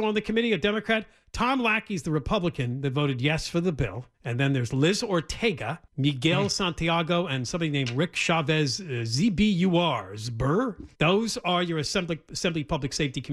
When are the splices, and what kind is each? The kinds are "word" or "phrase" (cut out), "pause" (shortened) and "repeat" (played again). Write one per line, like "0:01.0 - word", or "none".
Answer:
0:04.1 - pause
0:05.9 - pause
0:10.9 - pause